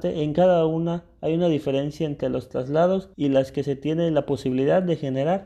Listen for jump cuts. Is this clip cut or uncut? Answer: cut